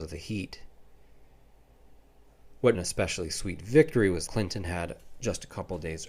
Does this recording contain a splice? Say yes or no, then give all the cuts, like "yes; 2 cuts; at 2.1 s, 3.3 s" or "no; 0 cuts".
yes; 2 cuts; at 2.7 s, 4.3 s